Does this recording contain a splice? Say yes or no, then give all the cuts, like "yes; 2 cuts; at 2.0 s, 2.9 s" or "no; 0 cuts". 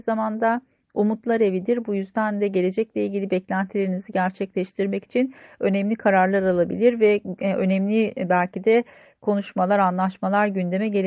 no; 0 cuts